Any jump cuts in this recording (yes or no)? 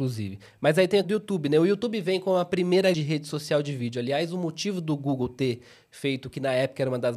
yes